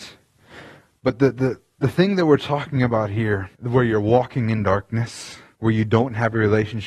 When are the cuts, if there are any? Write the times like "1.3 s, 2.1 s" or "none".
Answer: 3.5 s